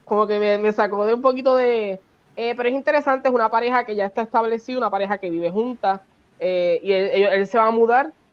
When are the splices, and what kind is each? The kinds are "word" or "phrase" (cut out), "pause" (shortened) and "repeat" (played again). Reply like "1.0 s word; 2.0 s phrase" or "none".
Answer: none

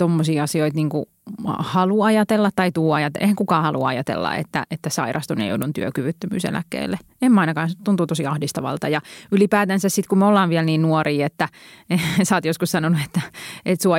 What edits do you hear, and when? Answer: none

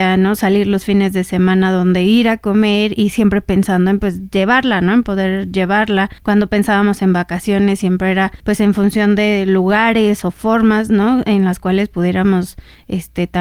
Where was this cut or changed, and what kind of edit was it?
6.2 s pause; 8.4 s pause

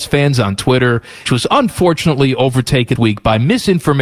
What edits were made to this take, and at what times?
1.3 s word; 3.0 s word

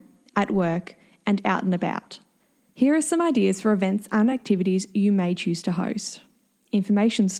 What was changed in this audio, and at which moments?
none

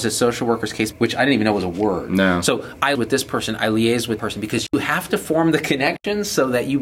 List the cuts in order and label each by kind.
0.9 s phrase; 2.9 s word; 4.2 s word

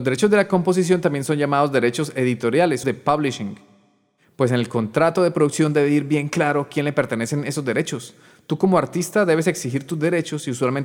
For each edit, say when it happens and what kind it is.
2.8 s phrase

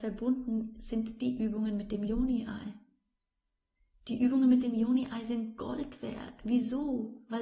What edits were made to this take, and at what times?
none

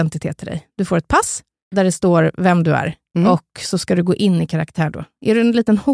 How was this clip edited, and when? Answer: none

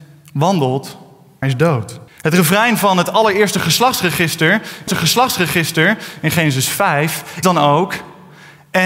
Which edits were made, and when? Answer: 1.4 s word; 2.1 s pause; 4.9 s repeat; 7.4 s word

